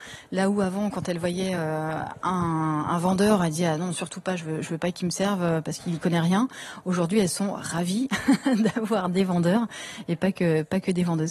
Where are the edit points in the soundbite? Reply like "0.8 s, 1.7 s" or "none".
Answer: none